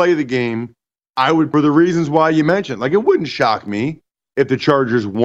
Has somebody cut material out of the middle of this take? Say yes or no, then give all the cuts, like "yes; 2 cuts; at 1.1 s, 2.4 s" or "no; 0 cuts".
yes; 1 cut; at 1.5 s